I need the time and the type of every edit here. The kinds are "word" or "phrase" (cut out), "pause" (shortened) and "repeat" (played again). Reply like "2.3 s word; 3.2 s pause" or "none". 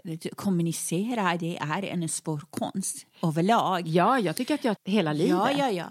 4.8 s word